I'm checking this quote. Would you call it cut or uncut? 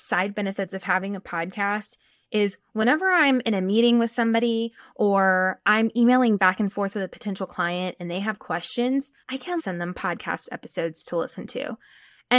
cut